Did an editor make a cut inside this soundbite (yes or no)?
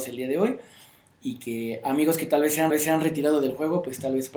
yes